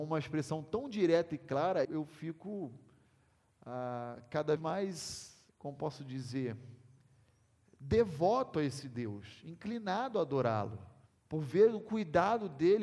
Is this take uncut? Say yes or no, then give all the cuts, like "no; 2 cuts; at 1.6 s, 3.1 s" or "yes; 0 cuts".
no; 4 cuts; at 1.8 s, 4.6 s, 5.5 s, 11.1 s